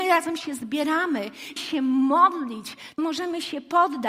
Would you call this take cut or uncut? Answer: cut